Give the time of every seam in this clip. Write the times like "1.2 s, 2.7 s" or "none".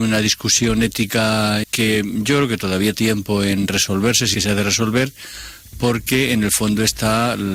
1.6 s, 2.9 s, 4.3 s